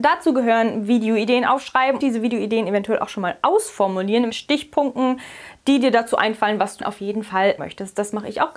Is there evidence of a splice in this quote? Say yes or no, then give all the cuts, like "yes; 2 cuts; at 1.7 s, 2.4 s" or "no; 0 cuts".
yes; 4 cuts; at 2.0 s, 4.3 s, 6.8 s, 7.6 s